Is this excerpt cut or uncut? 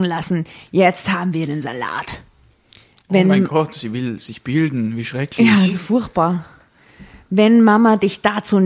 uncut